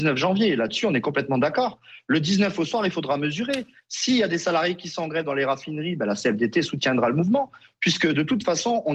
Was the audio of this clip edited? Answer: no; 0 cuts

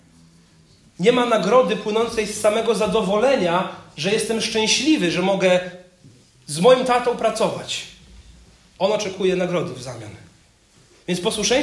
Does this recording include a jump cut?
no; 0 cuts

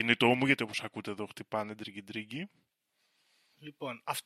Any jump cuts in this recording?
no; 0 cuts

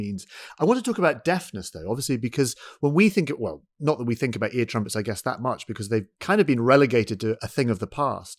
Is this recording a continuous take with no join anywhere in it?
yes; 0 cuts

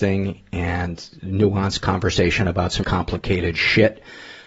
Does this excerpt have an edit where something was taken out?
yes; 1 cut; at 2.8 s

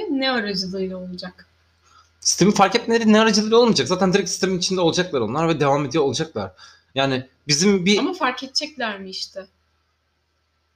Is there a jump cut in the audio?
no; 0 cuts

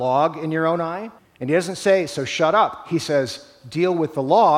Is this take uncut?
no; 1 cut; at 1.2 s

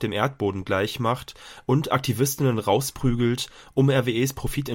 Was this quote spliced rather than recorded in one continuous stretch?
no; 0 cuts

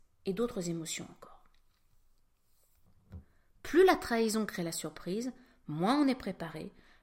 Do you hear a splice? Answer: no; 0 cuts

